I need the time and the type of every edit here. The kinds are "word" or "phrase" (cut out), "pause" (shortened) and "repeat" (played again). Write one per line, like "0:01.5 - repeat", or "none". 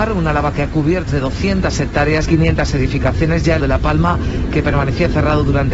0:01.1 - word
0:02.3 - phrase
0:03.6 - word